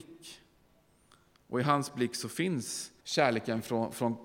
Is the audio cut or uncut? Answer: cut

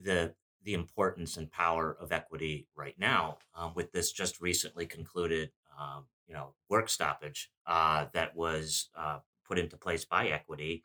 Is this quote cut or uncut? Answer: uncut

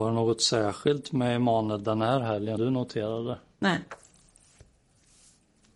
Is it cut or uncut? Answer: cut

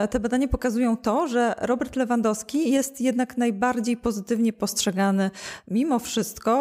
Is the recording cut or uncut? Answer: uncut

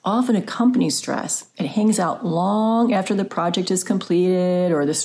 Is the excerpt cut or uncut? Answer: uncut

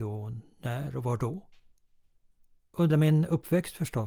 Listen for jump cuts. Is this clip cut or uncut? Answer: cut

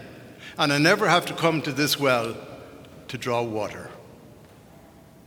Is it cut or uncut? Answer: uncut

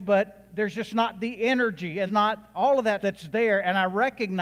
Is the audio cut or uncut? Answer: cut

